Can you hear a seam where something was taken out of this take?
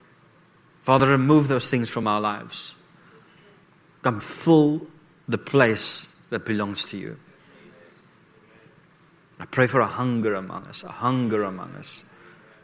no; 0 cuts

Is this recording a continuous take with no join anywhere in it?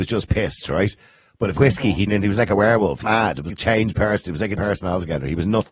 no; 5 cuts; at 1.6 s, 2.1 s, 3.0 s, 3.5 s, 4.6 s

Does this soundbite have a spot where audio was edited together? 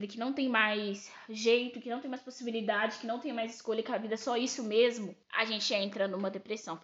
yes; 1 cut; at 5.2 s

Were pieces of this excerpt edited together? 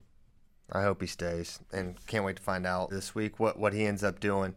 yes; 2 cuts; at 1.6 s, 2.9 s

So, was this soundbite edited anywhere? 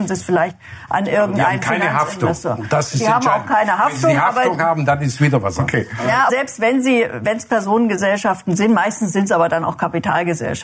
yes; 1 cut; at 6.3 s

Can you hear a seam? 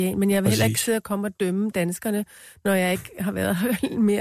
no; 0 cuts

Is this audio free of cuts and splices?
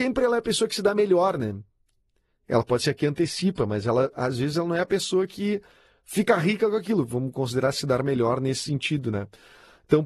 yes; 0 cuts

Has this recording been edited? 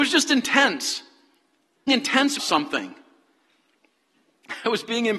yes; 2 cuts; at 1.9 s, 2.4 s

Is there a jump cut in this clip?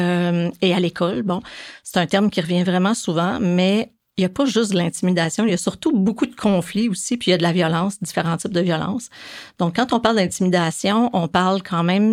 no; 0 cuts

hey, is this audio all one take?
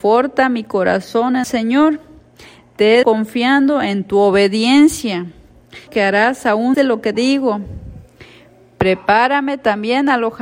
no; 5 cuts; at 1.4 s, 3.0 s, 5.9 s, 6.7 s, 7.1 s

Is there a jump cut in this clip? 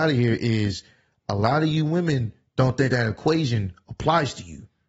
no; 0 cuts

